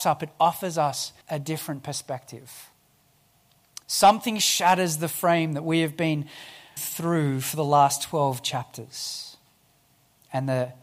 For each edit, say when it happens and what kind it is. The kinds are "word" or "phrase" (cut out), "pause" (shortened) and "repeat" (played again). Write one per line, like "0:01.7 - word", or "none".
0:01.2 - pause
0:03.8 - pause
0:06.8 - word